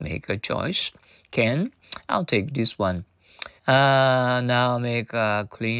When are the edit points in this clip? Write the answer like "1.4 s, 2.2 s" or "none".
3.6 s